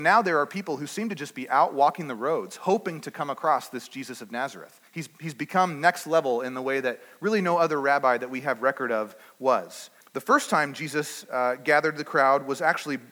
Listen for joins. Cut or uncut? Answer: cut